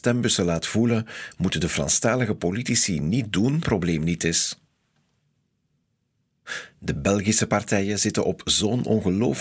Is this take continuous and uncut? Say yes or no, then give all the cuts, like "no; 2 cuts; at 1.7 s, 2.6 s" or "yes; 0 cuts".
no; 1 cut; at 3.6 s